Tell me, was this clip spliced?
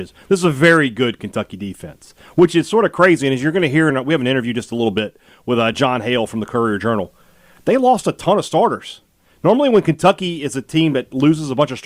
no; 0 cuts

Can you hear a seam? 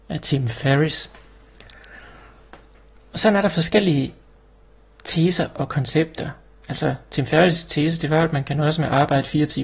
no; 0 cuts

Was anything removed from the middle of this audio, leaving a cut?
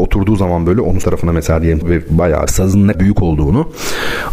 yes; 4 cuts; at 1.0 s, 1.8 s, 2.5 s, 2.9 s

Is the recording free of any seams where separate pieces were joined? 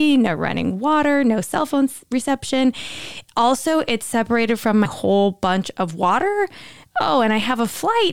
no; 1 cut; at 4.8 s

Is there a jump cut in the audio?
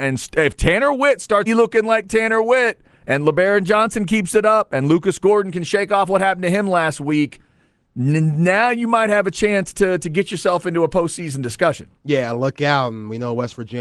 yes; 1 cut; at 1.5 s

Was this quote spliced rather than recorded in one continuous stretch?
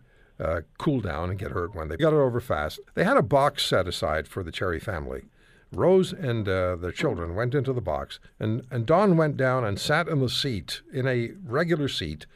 yes; 3 cuts; at 2.0 s, 2.9 s, 8.3 s

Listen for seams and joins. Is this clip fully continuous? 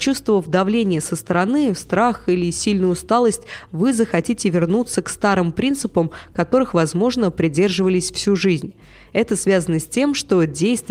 yes; 0 cuts

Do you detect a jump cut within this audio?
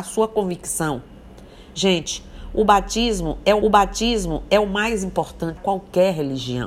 yes; 2 cuts; at 3.6 s, 5.6 s

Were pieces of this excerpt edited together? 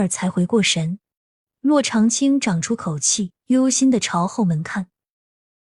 yes; 2 cuts; at 1.2 s, 3.4 s

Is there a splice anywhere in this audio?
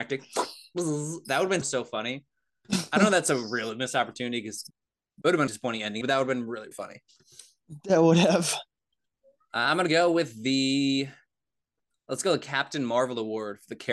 yes; 4 cuts; at 1.6 s, 5.5 s, 6.0 s, 6.7 s

